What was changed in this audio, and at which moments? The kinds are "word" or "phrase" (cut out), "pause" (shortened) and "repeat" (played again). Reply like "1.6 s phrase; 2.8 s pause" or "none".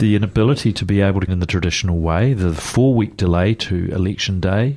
1.3 s word